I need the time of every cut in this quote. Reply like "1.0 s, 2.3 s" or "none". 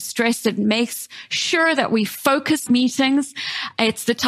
2.7 s